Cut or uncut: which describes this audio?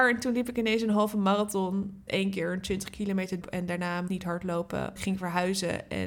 cut